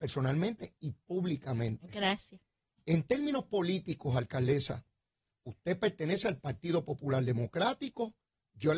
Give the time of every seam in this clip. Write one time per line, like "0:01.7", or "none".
none